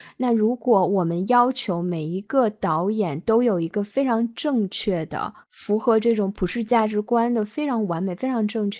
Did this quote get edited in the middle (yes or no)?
yes